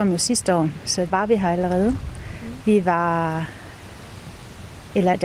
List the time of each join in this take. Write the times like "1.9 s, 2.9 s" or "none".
1.1 s